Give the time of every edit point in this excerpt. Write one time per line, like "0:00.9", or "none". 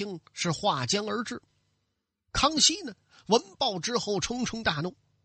none